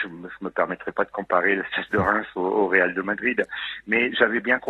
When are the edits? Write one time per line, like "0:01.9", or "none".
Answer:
none